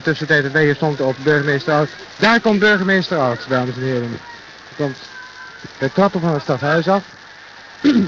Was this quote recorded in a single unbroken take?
no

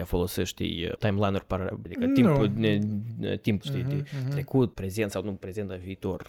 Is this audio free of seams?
no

